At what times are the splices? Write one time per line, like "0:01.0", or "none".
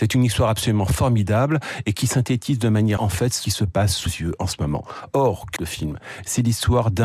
0:03.0
0:03.4
0:04.1
0:05.6

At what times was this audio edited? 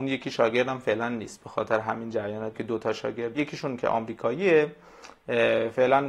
0:02.5
0:03.3

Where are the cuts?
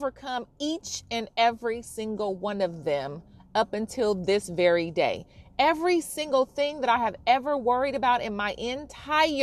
none

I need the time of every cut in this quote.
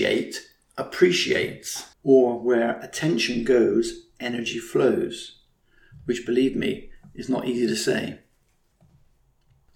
0:01.9

